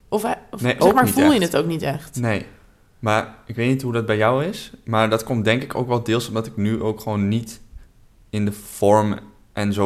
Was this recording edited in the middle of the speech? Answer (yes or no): no